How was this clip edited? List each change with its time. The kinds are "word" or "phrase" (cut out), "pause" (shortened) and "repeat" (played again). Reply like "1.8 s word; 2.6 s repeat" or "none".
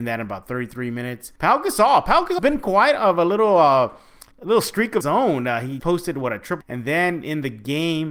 1.4 s pause; 2.4 s word; 4.3 s pause; 5.0 s word; 5.8 s word; 6.6 s phrase